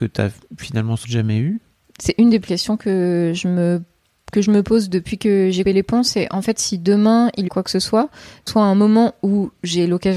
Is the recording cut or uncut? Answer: cut